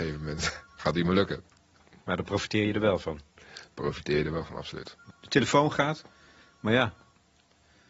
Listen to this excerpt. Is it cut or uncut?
uncut